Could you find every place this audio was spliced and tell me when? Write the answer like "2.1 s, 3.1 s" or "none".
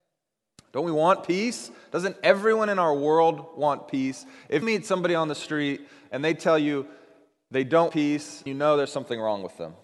4.6 s, 7.9 s, 8.5 s